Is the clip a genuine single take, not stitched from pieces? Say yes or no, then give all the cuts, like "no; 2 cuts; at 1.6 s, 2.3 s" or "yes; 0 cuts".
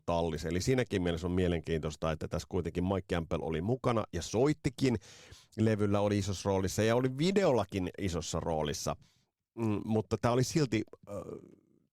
yes; 0 cuts